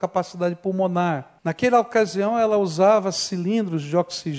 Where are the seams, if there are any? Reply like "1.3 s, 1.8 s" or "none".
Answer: 1.4 s

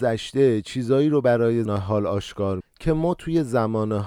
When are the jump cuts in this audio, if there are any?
1.7 s, 2.6 s

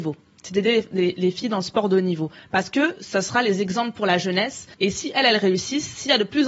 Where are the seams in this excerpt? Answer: 4.7 s

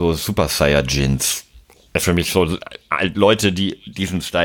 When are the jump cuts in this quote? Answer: 2.0 s

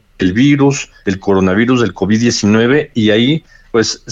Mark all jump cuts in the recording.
none

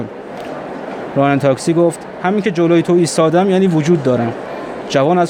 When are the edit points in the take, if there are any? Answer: none

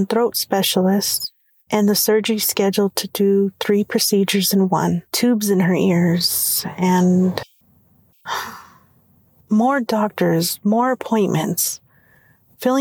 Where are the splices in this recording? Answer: 5.1 s

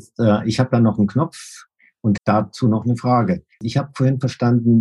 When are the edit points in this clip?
2.2 s, 3.5 s

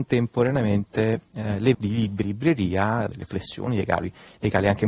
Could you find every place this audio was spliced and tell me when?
1.7 s, 2.2 s, 3.1 s

